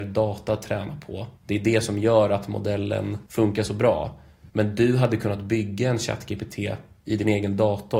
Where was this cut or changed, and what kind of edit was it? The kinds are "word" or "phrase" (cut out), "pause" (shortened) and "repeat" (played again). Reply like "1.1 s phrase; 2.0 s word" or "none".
1.4 s pause; 3.3 s pause; 4.5 s pause